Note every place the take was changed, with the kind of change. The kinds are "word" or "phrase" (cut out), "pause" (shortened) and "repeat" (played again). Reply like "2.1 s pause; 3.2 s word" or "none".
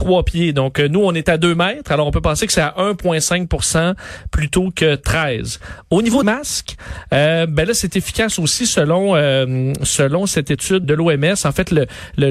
6.2 s word; 10.8 s word